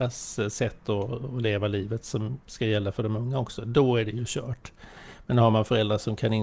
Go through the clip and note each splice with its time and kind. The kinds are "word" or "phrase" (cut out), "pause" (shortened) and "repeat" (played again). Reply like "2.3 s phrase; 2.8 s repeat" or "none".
none

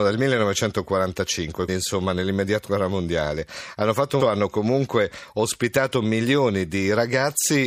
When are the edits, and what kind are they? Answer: 1.7 s word; 2.6 s phrase; 4.2 s phrase

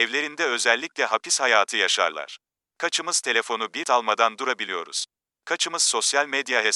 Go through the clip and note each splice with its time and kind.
3.8 s word

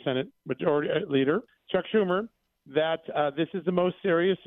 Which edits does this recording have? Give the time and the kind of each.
1.5 s word

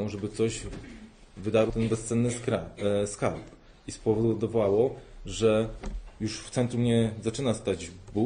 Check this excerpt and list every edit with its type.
1.7 s word

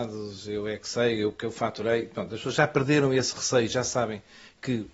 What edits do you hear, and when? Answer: none

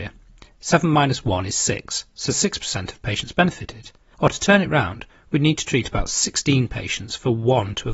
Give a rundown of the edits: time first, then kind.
none

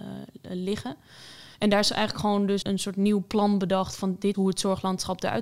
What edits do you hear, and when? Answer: 1.5 s pause; 2.6 s word; 4.3 s word

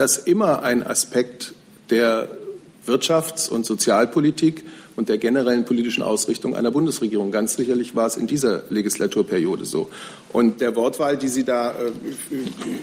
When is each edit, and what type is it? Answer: none

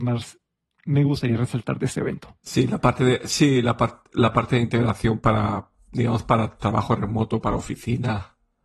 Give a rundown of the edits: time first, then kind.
none

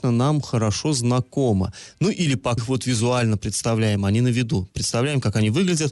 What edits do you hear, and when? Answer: 2.6 s phrase

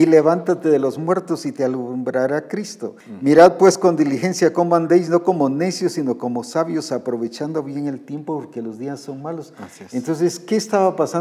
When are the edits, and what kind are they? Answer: 3.0 s pause

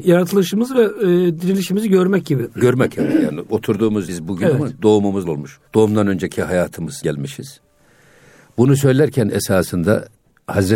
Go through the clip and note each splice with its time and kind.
4.1 s word; 5.2 s word; 5.7 s pause; 7.0 s word

